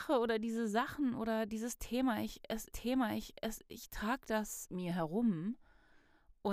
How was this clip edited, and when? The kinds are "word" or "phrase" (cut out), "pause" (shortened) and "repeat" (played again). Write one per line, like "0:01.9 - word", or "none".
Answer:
0:02.7 - repeat
0:04.7 - phrase

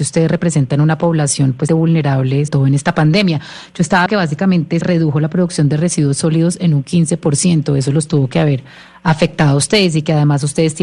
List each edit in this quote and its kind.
0:01.7 - word
0:02.5 - word
0:04.1 - word
0:04.8 - word

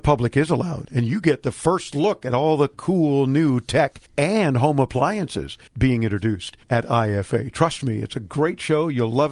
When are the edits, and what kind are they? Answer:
0:04.1 - pause
0:05.7 - pause
0:06.6 - pause

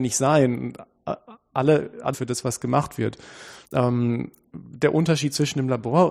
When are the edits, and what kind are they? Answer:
0:02.1 - phrase
0:03.6 - pause

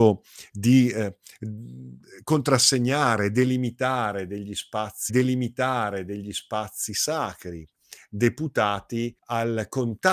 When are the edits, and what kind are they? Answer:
0:05.1 - repeat
0:09.2 - pause

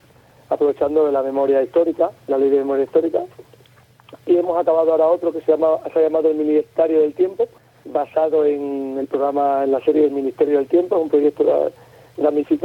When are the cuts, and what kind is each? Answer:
0:07.6 - pause

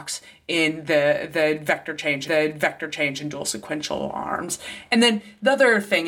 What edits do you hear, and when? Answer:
0:02.3 - repeat

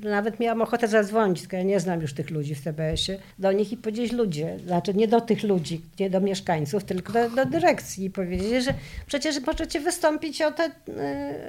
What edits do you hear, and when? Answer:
0:03.3 - pause
0:07.1 - word

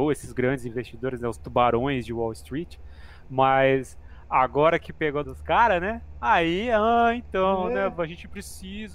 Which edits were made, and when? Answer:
0:05.2 - phrase

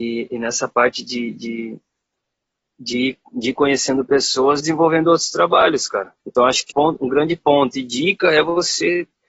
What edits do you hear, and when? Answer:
0:04.6 - phrase
0:06.2 - pause
0:06.7 - word

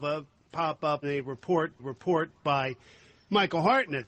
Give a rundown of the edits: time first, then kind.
0:01.0 - word
0:01.8 - repeat

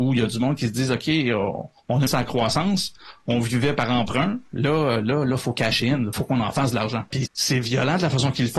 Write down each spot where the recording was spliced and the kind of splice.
0:02.1 - word
0:06.1 - word
0:07.3 - word

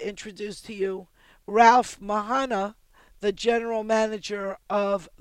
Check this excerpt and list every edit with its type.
none

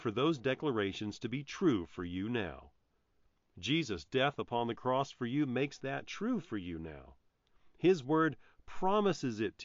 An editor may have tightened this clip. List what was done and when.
none

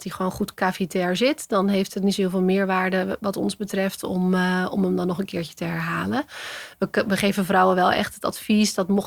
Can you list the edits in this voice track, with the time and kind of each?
none

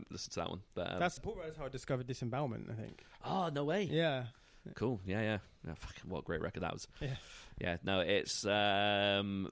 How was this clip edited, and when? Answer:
0:01.2 - word

